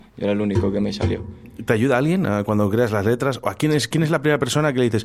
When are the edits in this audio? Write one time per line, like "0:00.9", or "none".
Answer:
none